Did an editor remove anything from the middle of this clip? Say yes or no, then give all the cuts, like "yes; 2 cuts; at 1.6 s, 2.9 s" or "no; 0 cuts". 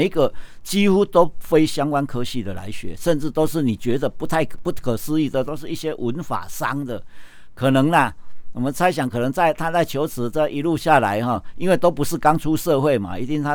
no; 0 cuts